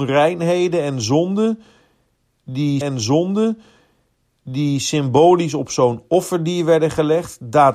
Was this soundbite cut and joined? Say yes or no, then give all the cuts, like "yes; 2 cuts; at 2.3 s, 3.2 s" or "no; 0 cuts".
yes; 1 cut; at 2.8 s